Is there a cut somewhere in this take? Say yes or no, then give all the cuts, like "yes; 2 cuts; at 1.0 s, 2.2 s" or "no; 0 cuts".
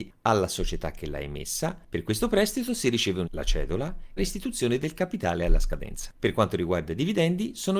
yes; 2 cuts; at 3.2 s, 4.2 s